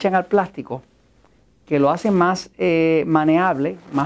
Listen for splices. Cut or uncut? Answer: uncut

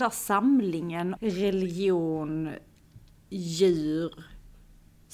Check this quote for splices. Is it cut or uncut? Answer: cut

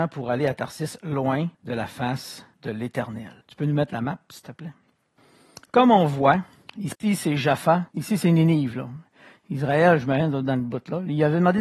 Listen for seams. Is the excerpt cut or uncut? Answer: cut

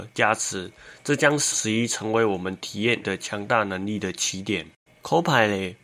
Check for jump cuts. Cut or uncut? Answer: cut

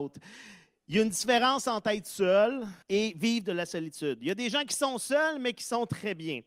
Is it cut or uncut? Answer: cut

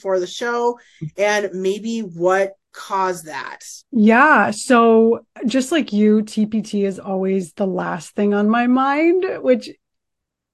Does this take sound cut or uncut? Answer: cut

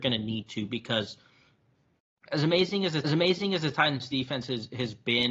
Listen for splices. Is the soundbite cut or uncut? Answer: cut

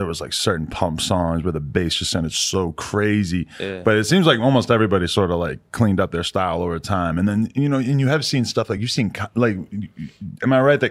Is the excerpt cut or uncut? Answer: uncut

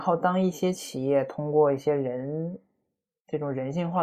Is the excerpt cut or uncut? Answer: uncut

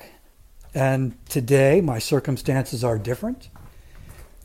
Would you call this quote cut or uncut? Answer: uncut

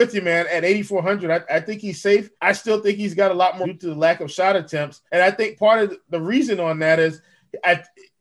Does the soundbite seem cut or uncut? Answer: cut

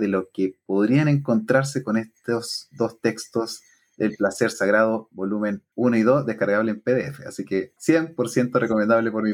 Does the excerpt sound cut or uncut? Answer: uncut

